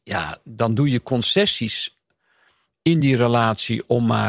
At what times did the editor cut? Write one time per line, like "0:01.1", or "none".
none